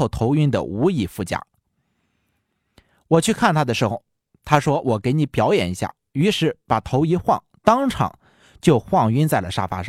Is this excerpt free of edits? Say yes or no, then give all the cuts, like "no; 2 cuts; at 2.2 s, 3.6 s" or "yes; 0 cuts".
yes; 0 cuts